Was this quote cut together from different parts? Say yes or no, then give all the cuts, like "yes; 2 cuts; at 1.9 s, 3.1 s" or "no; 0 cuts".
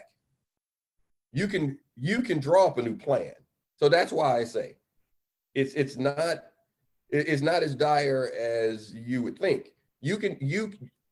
no; 0 cuts